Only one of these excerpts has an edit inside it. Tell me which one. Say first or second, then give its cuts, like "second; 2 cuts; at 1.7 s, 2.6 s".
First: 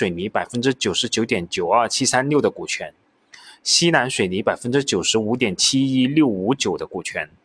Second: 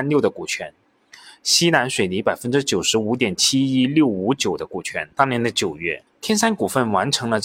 second; 1 cut; at 5.1 s